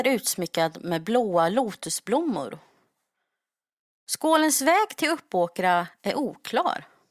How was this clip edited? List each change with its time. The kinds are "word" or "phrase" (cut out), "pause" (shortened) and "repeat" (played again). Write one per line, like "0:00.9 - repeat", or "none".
none